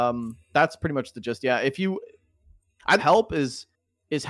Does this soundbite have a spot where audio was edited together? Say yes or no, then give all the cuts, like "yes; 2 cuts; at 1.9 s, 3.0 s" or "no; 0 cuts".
yes; 1 cut; at 3.0 s